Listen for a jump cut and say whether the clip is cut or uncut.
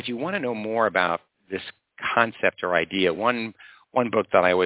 uncut